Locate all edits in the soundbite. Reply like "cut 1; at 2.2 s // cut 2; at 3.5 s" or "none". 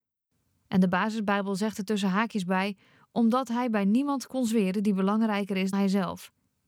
cut 1; at 5.7 s